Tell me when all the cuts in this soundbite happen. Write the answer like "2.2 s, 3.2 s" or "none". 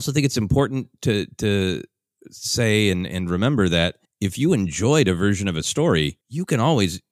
4.1 s, 6.2 s